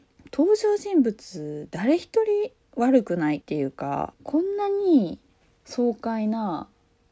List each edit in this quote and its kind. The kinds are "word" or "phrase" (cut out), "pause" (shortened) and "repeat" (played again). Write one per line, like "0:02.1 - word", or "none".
none